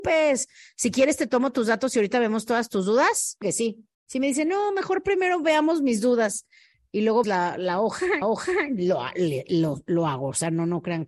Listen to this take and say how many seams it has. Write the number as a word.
four